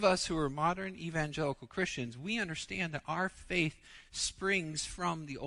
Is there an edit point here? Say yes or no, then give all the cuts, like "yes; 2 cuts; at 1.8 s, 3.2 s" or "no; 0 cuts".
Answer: no; 0 cuts